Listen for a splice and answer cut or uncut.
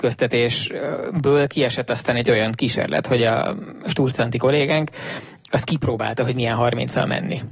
uncut